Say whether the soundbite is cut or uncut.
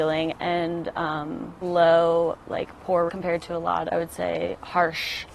cut